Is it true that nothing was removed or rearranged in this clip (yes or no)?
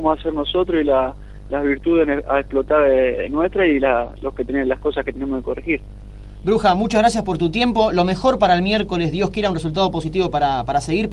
yes